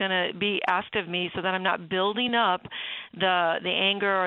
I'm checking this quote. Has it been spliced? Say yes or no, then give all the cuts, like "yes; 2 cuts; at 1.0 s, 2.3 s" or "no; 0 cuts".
no; 0 cuts